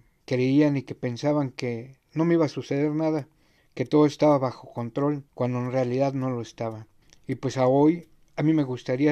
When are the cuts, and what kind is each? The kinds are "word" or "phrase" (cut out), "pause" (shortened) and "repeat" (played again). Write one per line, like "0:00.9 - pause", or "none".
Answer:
0:03.6 - pause
0:05.3 - pause
0:07.0 - pause